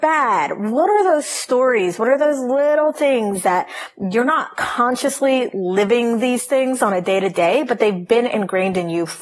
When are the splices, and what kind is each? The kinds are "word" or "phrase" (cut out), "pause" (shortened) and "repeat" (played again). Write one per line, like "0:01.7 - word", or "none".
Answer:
none